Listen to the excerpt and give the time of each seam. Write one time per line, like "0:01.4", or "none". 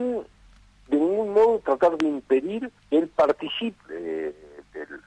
0:02.8
0:03.8